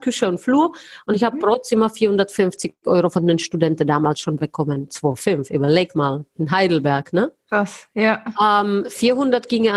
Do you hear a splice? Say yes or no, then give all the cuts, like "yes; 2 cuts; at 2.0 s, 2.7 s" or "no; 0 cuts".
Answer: no; 0 cuts